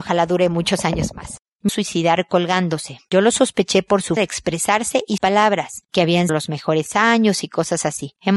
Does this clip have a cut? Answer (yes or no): yes